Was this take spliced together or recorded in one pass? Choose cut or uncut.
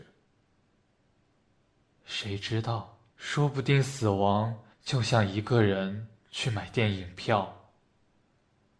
cut